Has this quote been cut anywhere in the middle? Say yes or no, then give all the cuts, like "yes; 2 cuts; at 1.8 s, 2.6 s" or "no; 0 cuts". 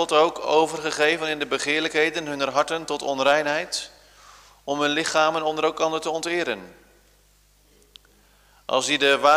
no; 0 cuts